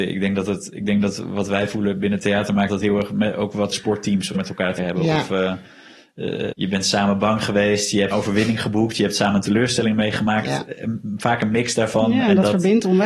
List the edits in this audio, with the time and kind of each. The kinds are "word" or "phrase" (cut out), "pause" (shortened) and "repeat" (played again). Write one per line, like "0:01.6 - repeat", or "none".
0:02.7 - word
0:03.7 - word
0:04.3 - word
0:04.8 - word
0:06.5 - word
0:08.1 - word